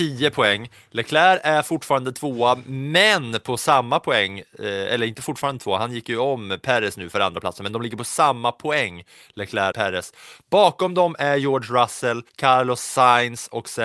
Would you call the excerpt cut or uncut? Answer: cut